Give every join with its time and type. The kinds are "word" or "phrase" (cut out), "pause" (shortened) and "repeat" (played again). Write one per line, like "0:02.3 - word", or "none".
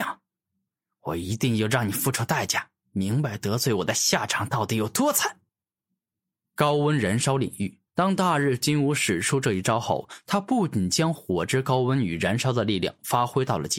0:05.5 - pause
0:07.9 - pause